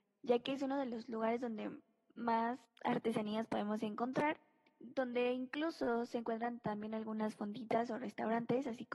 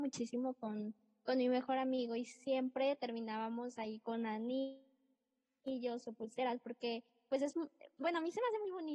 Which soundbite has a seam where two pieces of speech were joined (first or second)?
first